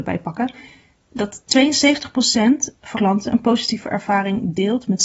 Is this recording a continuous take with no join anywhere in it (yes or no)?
no